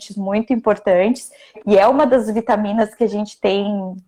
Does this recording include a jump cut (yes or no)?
no